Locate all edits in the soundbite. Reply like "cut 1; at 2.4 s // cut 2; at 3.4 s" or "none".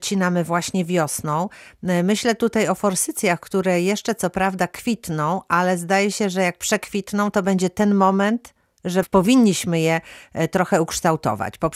none